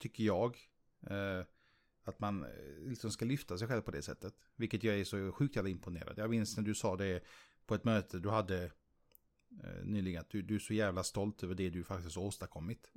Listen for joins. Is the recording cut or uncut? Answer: uncut